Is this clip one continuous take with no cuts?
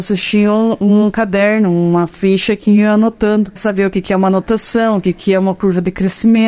no; 1 cut; at 3.6 s

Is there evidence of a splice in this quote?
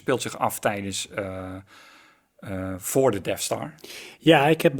no; 0 cuts

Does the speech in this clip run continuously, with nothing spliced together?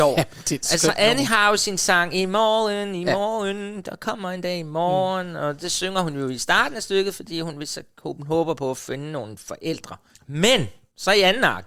yes; 0 cuts

